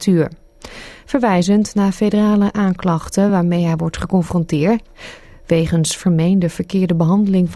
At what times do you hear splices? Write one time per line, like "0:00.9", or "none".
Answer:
none